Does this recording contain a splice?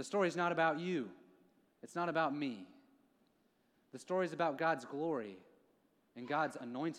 no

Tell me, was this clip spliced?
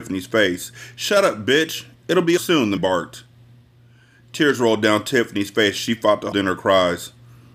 yes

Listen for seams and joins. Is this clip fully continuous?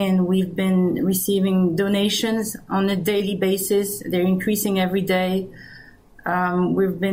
yes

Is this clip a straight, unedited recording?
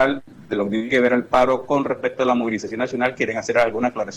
yes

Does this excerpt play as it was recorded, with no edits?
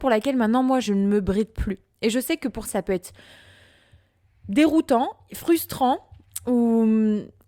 no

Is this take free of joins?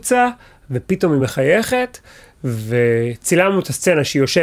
yes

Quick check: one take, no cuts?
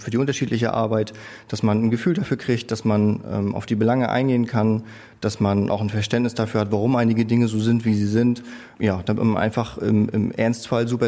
yes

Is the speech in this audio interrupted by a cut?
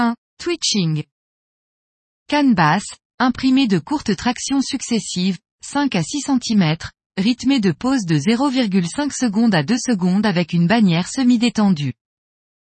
no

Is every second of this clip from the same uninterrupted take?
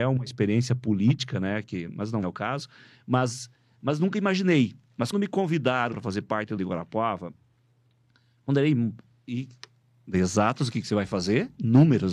no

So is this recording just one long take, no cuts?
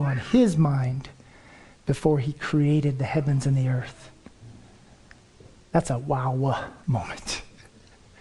yes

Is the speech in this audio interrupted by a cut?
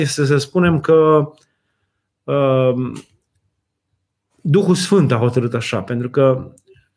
no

